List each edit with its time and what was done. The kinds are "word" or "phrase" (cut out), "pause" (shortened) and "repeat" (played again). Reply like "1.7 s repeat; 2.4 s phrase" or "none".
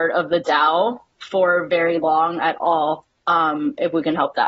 none